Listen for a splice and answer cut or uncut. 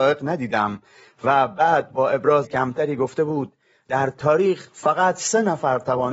cut